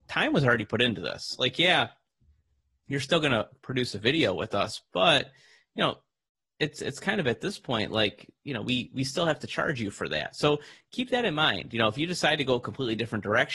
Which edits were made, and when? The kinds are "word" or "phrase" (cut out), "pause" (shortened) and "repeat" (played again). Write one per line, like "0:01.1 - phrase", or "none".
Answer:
none